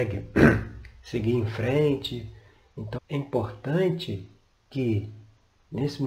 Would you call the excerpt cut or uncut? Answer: cut